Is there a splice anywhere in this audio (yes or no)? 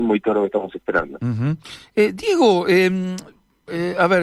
no